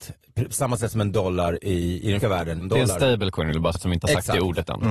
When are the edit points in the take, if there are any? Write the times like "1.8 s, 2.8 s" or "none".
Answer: 1.6 s, 2.2 s, 2.6 s, 3.7 s